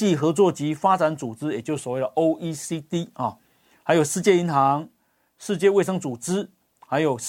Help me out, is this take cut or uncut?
uncut